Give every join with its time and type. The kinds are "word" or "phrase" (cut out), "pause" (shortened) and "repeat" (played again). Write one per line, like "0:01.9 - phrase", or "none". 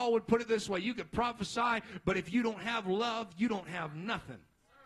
none